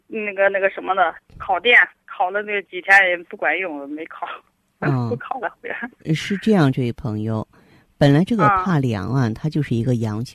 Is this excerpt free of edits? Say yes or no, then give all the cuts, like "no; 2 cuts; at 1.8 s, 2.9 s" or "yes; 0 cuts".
yes; 0 cuts